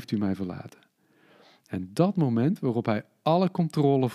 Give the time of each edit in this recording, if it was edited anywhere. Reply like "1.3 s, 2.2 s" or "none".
none